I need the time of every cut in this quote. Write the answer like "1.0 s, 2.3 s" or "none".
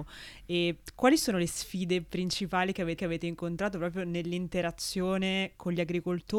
3.0 s